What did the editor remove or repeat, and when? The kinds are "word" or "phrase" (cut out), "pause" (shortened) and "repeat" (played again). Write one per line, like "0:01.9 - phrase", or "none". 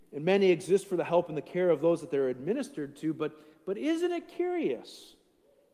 none